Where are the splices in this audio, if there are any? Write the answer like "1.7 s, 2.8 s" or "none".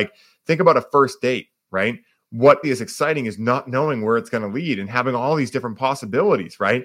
2.6 s